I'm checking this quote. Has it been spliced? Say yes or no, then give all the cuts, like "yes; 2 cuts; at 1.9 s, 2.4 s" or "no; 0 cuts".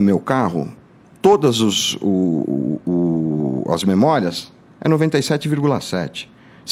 no; 0 cuts